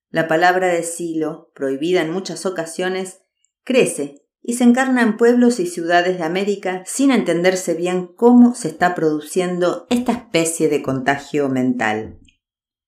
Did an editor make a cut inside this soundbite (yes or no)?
no